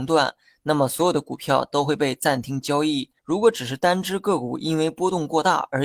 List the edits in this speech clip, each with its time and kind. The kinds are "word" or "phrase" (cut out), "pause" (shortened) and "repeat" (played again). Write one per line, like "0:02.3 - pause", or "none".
0:03.2 - pause